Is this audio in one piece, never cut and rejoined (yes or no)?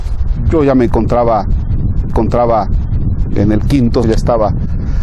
no